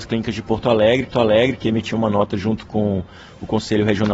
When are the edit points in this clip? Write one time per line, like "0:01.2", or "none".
0:01.1

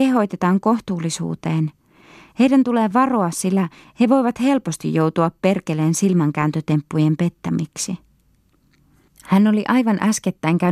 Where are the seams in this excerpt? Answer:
none

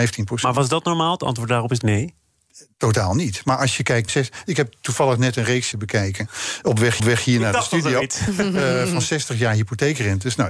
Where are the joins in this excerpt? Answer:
0:01.8
0:04.1
0:05.7
0:07.0

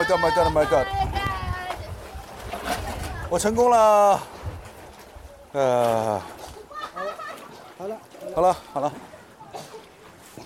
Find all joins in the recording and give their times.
none

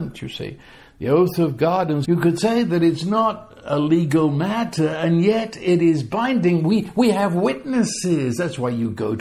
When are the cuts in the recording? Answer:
0:02.0

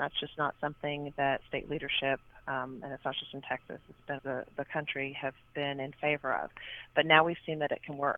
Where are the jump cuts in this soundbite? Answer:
0:04.2

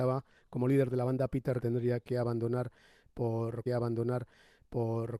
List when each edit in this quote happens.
0:01.6
0:03.7

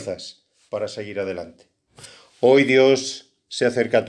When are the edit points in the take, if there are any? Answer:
none

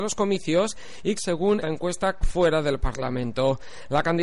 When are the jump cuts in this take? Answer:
0:01.2
0:01.6
0:02.2

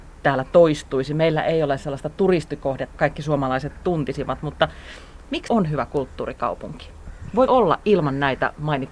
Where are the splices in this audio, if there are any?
0:02.9
0:05.5
0:07.5

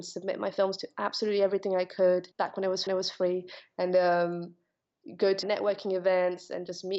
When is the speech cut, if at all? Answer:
0:02.3
0:02.9
0:05.4

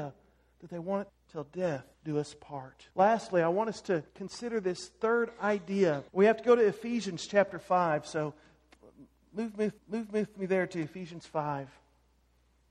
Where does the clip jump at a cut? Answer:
0:01.1
0:01.9
0:02.9
0:04.1
0:06.1
0:09.8

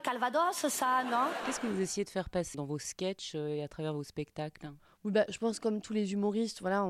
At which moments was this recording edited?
0:02.5

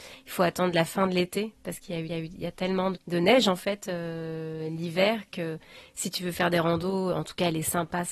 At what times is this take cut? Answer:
0:02.1
0:02.9

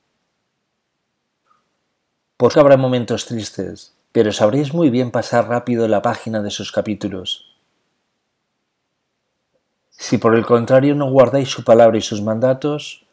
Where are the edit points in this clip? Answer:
0:02.5
0:04.0

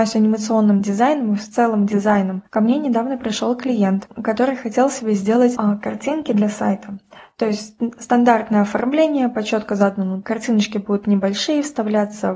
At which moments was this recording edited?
0:10.2

